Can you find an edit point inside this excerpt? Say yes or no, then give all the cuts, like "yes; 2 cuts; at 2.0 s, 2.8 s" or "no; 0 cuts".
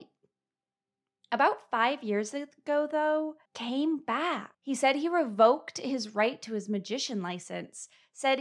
yes; 2 cuts; at 3.5 s, 4.5 s